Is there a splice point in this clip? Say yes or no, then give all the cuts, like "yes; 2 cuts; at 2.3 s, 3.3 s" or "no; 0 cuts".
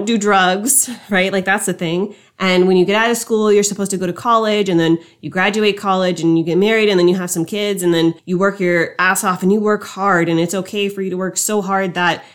yes; 1 cut; at 8.2 s